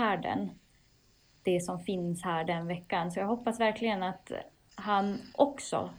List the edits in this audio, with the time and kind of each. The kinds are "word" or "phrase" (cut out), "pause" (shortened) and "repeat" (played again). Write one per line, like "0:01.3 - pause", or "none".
none